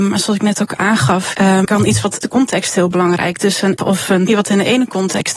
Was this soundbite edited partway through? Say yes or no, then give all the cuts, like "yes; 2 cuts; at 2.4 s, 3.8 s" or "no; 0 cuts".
yes; 5 cuts; at 1.3 s, 1.6 s, 2.2 s, 3.8 s, 4.3 s